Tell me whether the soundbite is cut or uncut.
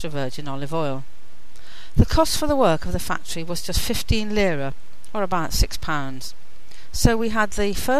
uncut